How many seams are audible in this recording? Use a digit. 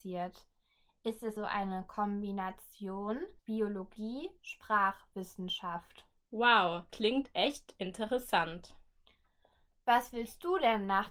4